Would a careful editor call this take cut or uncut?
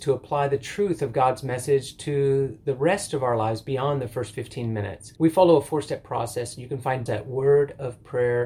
cut